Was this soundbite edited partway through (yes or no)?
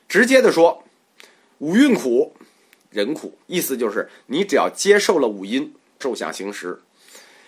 yes